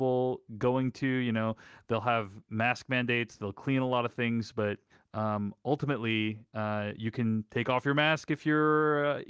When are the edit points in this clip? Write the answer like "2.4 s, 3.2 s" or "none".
4.9 s